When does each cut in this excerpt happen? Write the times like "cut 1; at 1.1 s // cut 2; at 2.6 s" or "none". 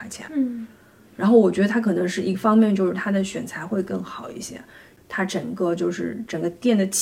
none

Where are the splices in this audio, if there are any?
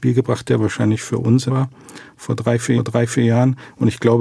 cut 1; at 1.5 s // cut 2; at 2.8 s

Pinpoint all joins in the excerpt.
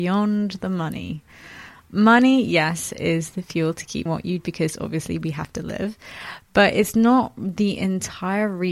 cut 1; at 4.1 s // cut 2; at 4.4 s

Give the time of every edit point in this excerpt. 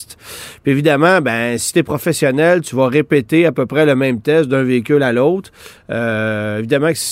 none

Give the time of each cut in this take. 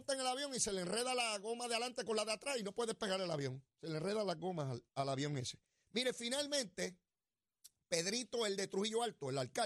cut 1; at 4.9 s

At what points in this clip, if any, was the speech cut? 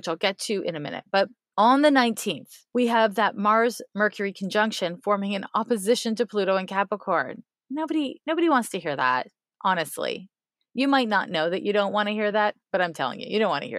none

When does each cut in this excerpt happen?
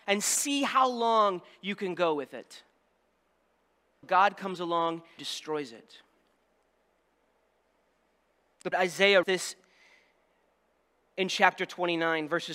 cut 1; at 4.0 s // cut 2; at 5.2 s // cut 3; at 8.7 s // cut 4; at 9.2 s

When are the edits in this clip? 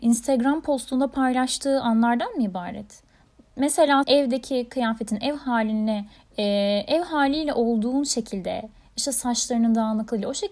cut 1; at 4.0 s // cut 2; at 6.2 s

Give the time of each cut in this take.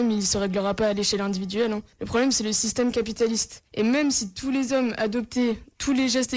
cut 1; at 1.9 s // cut 2; at 3.7 s

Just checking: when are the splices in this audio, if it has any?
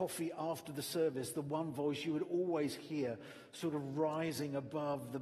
none

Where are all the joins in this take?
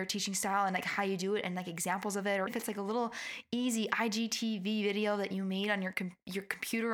cut 1; at 2.5 s

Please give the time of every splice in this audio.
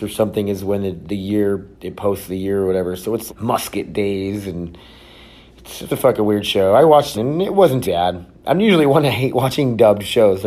cut 1; at 1.7 s // cut 2; at 3.3 s // cut 3; at 5.9 s // cut 4; at 7.1 s // cut 5; at 7.8 s

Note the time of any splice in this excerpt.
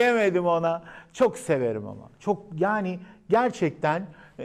none

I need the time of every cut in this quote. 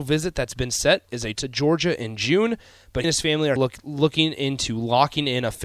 cut 1; at 1.3 s // cut 2; at 3.0 s // cut 3; at 3.6 s

